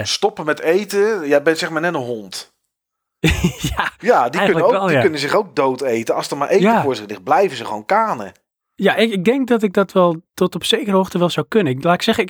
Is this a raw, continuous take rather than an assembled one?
yes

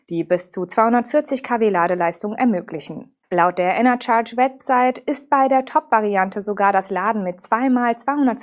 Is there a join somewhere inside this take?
yes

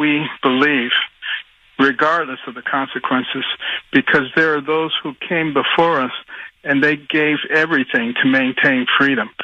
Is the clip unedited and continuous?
yes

